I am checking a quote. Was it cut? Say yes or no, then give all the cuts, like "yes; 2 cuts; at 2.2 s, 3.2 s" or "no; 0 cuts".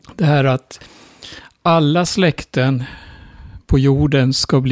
no; 0 cuts